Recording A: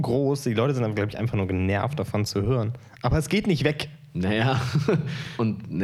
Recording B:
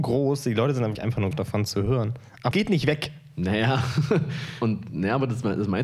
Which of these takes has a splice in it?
B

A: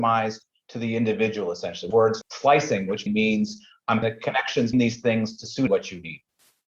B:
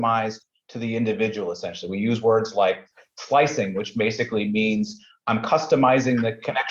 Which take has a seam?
A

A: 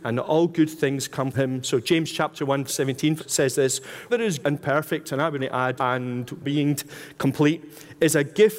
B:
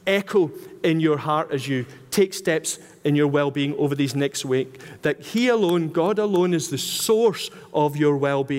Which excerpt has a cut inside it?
A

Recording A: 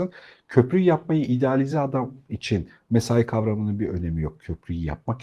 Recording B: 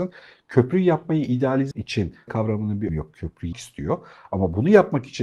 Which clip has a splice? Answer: B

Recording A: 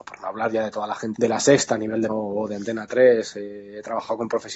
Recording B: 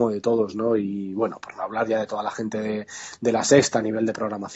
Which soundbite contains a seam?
A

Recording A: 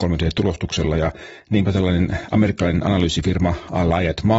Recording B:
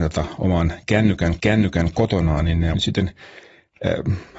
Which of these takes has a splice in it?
B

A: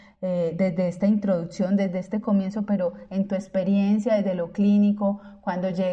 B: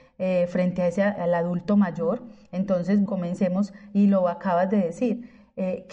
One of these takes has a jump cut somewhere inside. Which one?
B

